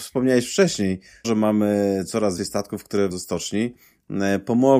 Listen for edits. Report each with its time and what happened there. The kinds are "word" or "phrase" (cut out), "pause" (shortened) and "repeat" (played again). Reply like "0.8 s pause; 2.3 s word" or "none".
1.2 s word; 2.4 s word; 3.1 s word